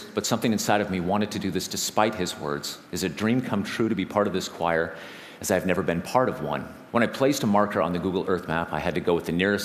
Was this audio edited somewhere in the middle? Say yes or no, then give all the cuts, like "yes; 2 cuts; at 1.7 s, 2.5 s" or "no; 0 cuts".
yes; 2 cuts; at 2.8 s, 6.9 s